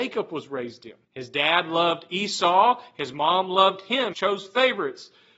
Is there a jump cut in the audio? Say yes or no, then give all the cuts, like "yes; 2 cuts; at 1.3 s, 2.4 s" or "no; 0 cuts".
yes; 2 cuts; at 1.0 s, 4.1 s